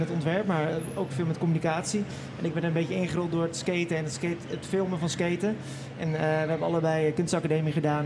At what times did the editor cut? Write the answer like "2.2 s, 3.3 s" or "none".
none

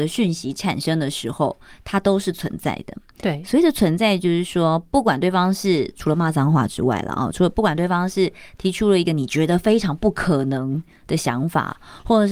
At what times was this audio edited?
none

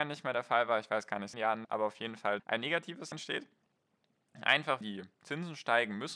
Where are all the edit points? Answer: 1.3 s, 1.6 s, 2.4 s, 3.1 s, 4.8 s

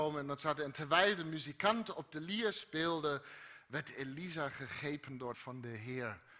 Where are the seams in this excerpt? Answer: 5.3 s

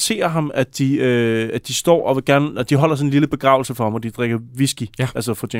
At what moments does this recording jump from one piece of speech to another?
none

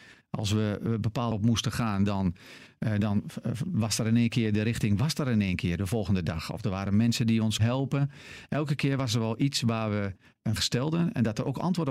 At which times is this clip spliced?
1.3 s, 7.6 s, 10.6 s

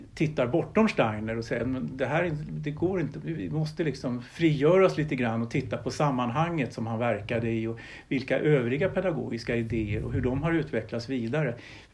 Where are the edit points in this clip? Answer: none

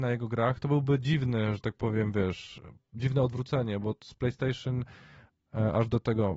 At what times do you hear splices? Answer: none

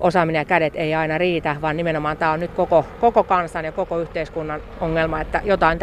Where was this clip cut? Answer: none

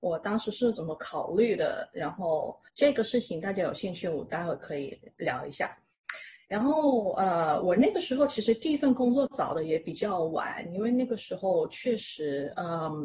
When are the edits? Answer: 2.7 s

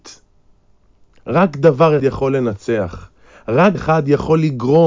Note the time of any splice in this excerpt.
2.0 s, 3.7 s

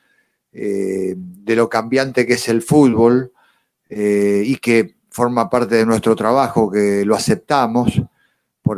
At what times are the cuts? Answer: none

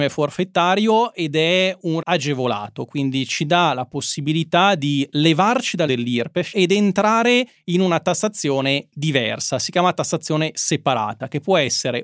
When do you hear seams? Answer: 2.0 s, 5.9 s, 6.5 s

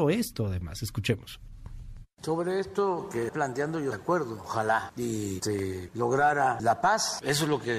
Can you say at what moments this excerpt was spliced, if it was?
3.3 s, 3.9 s

